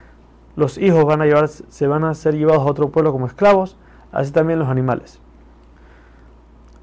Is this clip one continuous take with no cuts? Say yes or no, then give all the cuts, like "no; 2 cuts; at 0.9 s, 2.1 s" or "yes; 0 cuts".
yes; 0 cuts